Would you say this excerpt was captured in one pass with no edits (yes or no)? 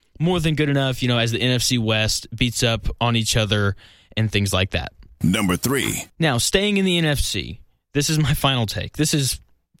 yes